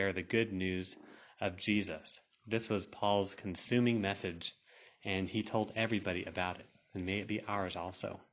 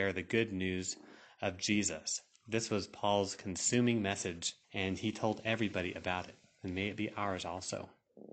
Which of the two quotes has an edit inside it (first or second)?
second